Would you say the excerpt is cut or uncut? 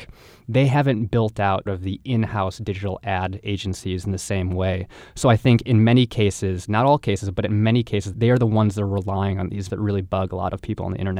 cut